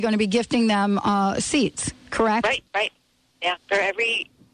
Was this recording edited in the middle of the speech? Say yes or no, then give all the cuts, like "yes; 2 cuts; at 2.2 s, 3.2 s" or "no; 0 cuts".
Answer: yes; 2 cuts; at 2.7 s, 3.6 s